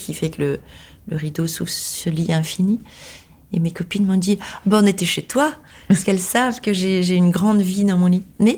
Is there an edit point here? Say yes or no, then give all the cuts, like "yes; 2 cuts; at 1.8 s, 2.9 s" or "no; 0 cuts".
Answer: no; 0 cuts